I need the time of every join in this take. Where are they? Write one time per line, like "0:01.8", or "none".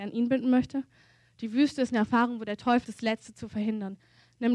0:02.8